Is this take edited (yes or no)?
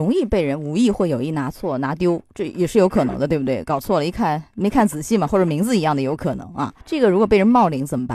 yes